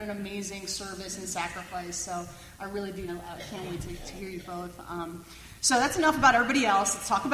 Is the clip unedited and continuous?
no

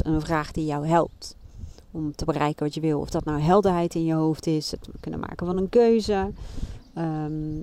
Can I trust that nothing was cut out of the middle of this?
yes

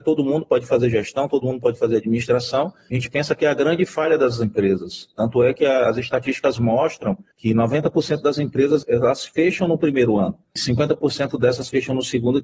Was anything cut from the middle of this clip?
yes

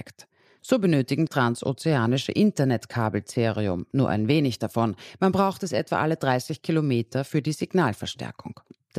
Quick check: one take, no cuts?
no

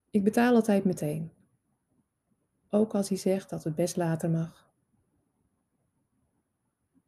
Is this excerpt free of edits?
yes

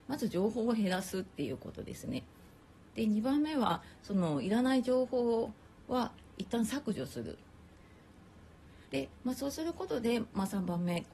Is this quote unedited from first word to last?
no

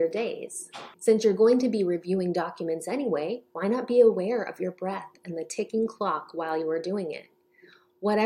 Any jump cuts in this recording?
yes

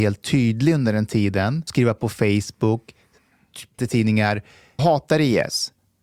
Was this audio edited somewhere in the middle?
yes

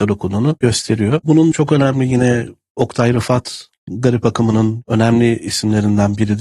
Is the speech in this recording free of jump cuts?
no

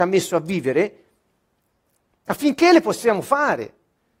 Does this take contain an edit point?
no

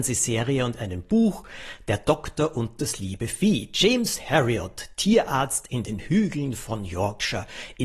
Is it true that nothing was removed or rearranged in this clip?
yes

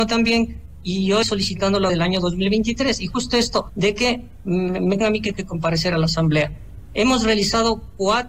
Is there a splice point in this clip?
yes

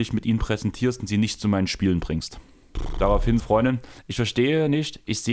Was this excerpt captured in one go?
no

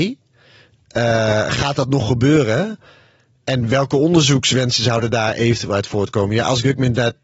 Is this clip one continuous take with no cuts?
yes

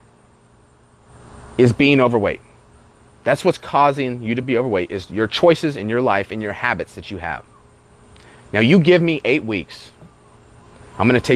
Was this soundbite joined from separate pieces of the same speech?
no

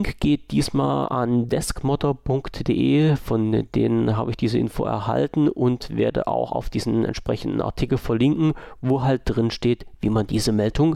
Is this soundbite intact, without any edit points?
yes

